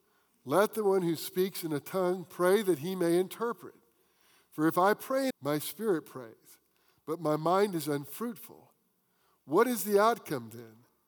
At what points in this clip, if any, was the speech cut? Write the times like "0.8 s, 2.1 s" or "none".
5.3 s